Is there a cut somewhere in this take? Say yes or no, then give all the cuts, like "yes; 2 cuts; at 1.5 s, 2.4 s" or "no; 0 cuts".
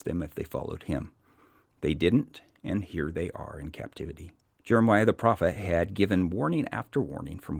yes; 1 cut; at 4.4 s